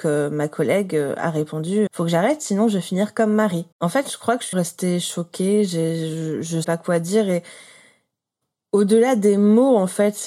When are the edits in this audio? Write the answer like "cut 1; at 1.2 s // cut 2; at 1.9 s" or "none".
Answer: cut 1; at 1.9 s // cut 2; at 3.7 s // cut 3; at 4.5 s // cut 4; at 6.6 s